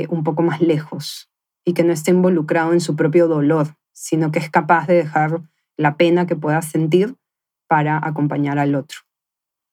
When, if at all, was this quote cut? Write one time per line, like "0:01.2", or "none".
0:03.8